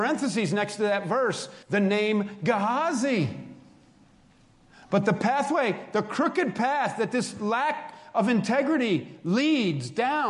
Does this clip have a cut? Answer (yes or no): yes